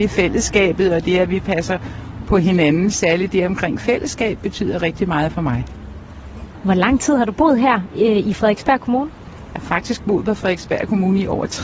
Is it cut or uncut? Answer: uncut